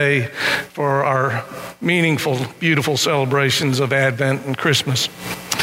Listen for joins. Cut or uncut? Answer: uncut